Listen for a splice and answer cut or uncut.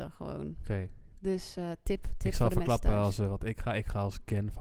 uncut